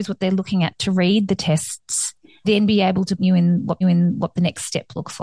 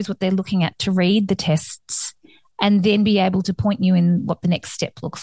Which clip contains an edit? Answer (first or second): first